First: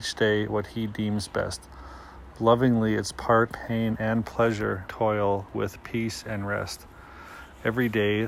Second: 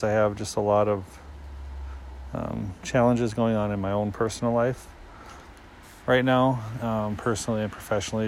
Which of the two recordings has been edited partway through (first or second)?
first